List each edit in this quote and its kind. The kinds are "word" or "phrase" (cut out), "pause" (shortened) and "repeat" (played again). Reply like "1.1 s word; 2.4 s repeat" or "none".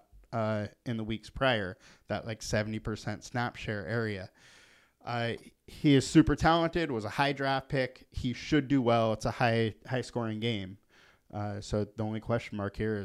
none